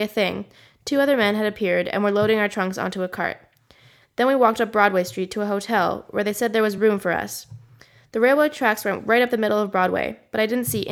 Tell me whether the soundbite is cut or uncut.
uncut